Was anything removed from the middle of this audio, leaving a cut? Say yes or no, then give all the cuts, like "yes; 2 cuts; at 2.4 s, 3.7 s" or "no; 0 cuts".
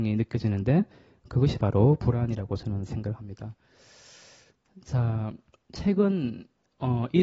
no; 0 cuts